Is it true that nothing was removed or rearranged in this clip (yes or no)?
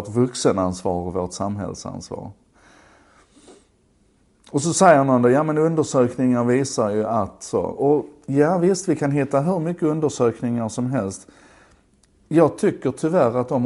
yes